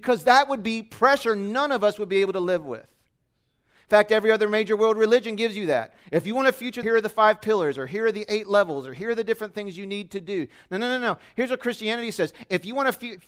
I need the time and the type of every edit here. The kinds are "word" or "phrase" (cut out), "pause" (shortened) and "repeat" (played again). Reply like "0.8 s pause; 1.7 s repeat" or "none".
6.8 s phrase